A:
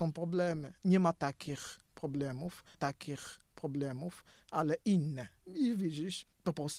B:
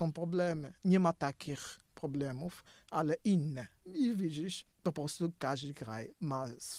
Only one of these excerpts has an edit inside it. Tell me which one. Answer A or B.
A